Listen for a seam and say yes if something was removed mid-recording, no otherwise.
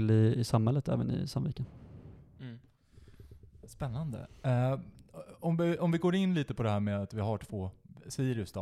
no